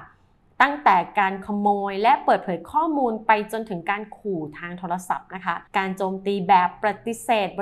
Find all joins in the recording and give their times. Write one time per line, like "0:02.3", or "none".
0:05.7